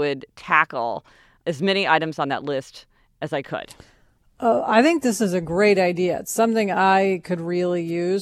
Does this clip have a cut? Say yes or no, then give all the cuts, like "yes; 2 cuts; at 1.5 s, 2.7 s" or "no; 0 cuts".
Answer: no; 0 cuts